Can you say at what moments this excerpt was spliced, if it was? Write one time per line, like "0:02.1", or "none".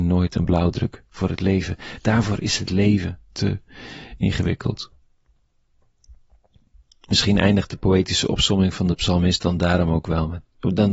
none

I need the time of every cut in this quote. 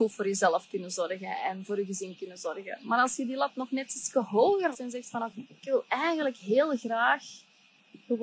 0:04.7
0:05.3

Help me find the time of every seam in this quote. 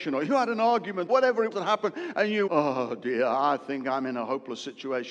0:01.1
0:01.5
0:02.5

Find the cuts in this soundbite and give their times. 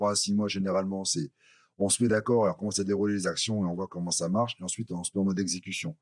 none

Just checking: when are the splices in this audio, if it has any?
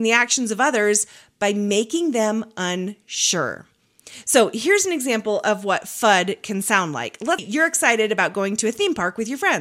0:07.4

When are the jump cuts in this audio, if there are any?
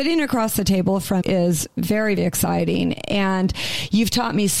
0:01.2
0:02.2

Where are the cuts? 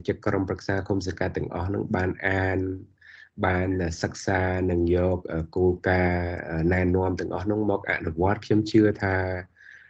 none

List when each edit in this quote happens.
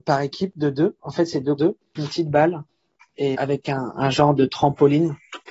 0:01.6
0:02.0
0:03.3

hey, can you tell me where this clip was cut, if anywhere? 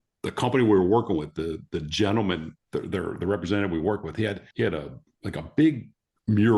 0:02.6
0:04.5

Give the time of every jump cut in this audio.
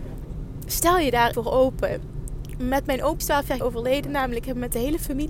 0:01.3
0:03.2
0:03.6

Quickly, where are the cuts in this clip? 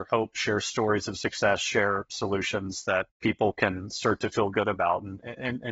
0:03.1

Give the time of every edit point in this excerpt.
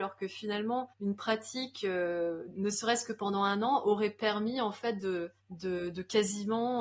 0:00.9
0:05.4

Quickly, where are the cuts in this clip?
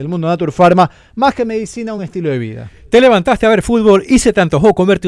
none

